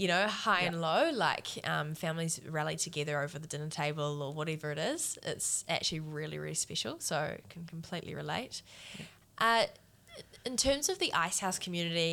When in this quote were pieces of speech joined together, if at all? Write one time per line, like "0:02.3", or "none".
none